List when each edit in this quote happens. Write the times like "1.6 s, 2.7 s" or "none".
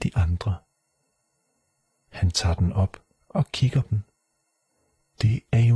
3.8 s